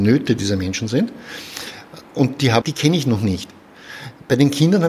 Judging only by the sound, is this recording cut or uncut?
cut